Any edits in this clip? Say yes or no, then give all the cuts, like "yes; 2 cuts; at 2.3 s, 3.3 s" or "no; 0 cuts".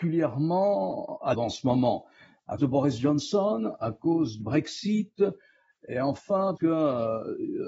yes; 4 cuts; at 1.3 s, 2.6 s, 4.4 s, 6.6 s